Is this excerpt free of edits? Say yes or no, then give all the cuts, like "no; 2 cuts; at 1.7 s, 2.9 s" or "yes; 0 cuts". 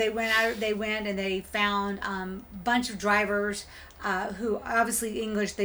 yes; 0 cuts